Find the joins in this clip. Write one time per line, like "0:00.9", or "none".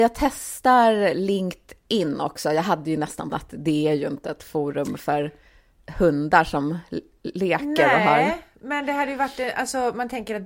0:03.3